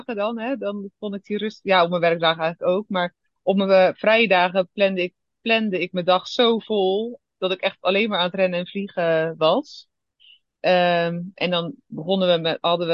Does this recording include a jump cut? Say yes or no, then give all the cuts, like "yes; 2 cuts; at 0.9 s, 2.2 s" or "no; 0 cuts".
no; 0 cuts